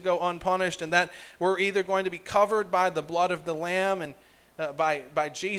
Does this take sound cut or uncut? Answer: uncut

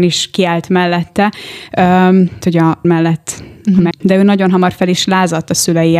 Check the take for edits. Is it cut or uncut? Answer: cut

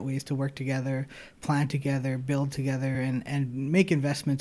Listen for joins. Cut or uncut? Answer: uncut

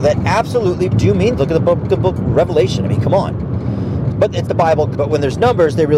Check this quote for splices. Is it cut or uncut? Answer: cut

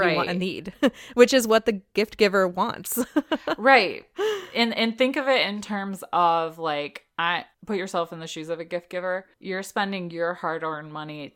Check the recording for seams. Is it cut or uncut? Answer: cut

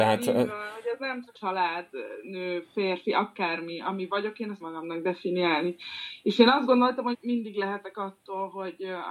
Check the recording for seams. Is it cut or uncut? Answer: cut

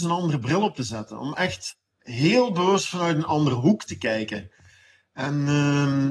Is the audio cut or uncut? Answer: uncut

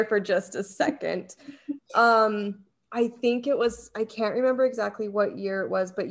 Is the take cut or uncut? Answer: uncut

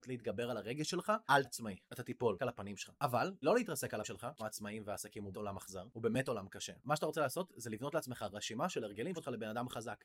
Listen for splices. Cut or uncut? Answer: cut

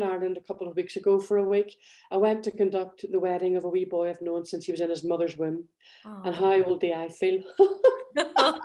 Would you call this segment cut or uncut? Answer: uncut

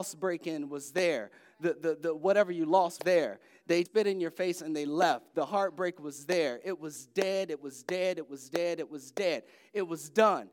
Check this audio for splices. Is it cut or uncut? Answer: cut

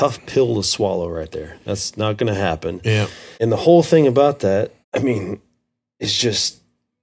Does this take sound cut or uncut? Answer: cut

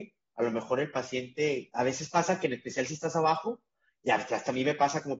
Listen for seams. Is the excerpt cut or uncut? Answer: uncut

